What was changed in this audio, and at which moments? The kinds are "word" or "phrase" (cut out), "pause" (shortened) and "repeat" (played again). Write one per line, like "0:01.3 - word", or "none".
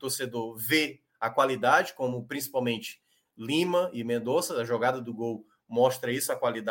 none